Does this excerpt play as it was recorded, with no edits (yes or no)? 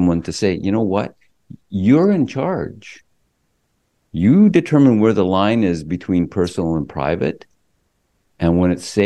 yes